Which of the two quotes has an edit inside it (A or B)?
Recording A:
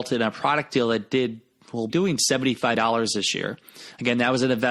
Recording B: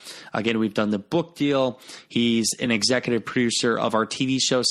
A